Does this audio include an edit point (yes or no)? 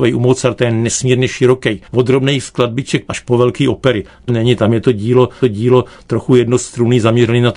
yes